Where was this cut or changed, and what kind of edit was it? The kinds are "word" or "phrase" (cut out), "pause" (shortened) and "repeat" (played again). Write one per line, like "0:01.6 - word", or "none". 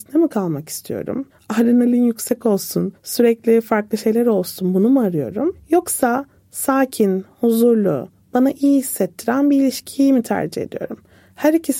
none